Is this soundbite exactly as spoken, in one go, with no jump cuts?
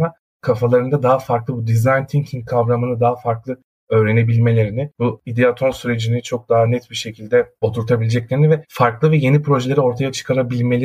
yes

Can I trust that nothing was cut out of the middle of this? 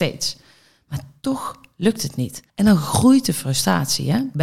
no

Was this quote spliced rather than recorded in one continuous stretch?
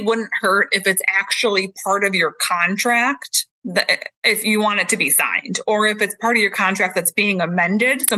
yes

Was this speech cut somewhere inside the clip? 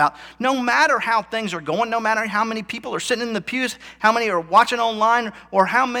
no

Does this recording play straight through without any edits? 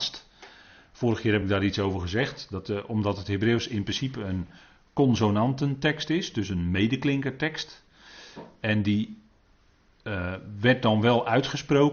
yes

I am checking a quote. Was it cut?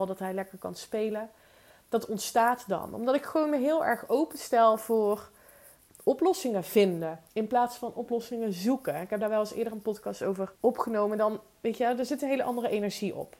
yes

